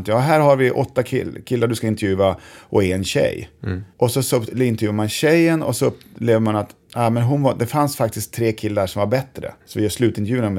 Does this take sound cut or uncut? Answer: cut